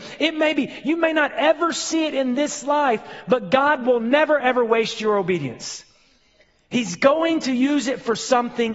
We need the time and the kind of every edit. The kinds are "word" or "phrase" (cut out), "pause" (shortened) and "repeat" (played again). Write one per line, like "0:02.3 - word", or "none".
0:04.4 - word